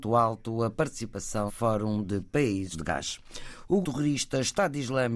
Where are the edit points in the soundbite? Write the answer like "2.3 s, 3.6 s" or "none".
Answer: 1.5 s, 2.7 s, 3.8 s